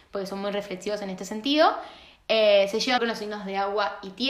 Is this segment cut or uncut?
cut